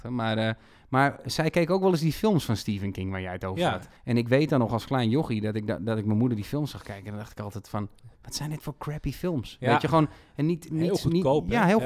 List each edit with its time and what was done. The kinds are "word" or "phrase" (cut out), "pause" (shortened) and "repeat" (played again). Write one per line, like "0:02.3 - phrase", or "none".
0:04.0 - pause
0:08.2 - pause